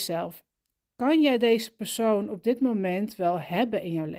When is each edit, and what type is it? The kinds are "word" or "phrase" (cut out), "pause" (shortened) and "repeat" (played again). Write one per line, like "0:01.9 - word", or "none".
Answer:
none